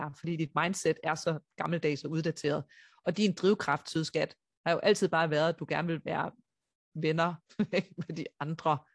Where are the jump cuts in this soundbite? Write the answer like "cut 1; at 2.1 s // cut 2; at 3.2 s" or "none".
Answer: none